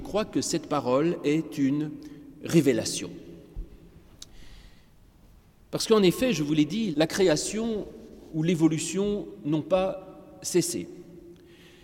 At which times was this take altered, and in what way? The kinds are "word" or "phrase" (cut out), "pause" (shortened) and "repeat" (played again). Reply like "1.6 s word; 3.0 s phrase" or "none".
6.9 s word